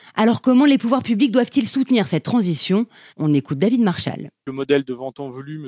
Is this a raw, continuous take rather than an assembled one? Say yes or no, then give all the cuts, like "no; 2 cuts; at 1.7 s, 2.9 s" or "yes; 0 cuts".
no; 1 cut; at 3.1 s